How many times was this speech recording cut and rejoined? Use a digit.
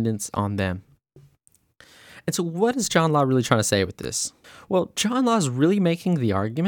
1